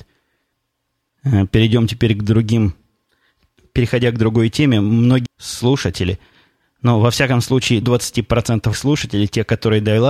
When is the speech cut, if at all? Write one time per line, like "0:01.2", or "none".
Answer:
0:05.3
0:07.8
0:08.7

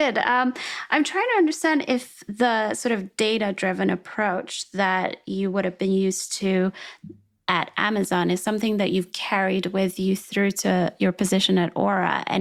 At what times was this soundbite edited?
none

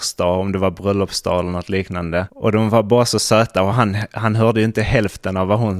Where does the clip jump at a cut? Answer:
none

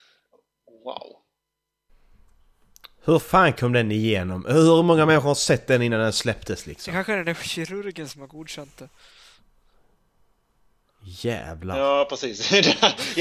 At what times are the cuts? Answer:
none

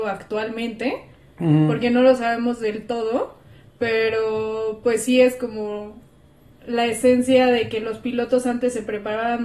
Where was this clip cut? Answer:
none

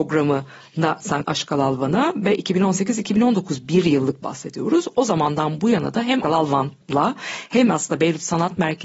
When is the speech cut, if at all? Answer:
0:01.2
0:04.2
0:06.2
0:06.8

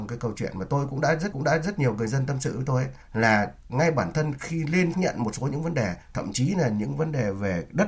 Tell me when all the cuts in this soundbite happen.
0:01.3
0:03.0
0:04.9
0:06.0

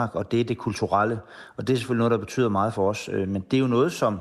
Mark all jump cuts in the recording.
none

